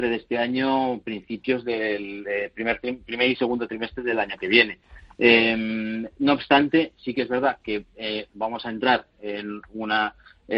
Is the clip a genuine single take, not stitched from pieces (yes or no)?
yes